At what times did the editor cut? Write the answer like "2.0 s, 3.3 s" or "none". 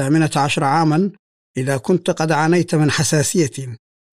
none